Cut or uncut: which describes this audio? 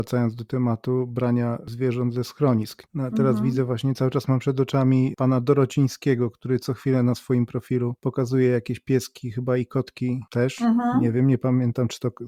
uncut